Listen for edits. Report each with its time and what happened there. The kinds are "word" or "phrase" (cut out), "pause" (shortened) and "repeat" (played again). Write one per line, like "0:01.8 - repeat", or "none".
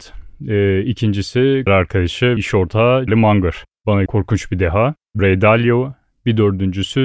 0:01.7 - word
0:02.4 - word
0:03.1 - word
0:04.1 - word
0:05.2 - word